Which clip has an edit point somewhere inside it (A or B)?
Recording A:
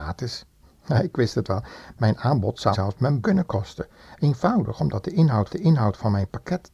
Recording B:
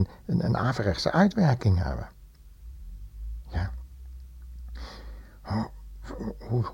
A